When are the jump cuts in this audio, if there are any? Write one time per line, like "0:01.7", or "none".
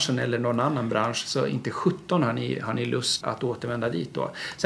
0:03.2